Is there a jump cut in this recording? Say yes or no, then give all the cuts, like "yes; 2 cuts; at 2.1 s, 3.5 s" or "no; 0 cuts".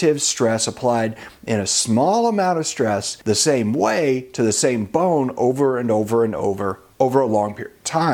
yes; 1 cut; at 3.2 s